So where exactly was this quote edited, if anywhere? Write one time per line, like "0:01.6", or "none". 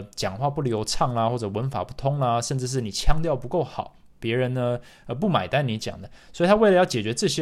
none